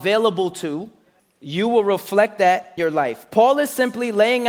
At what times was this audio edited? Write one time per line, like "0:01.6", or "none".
0:01.2
0:02.8